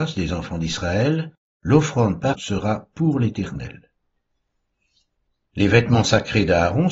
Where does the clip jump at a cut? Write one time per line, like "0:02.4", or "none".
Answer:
0:02.3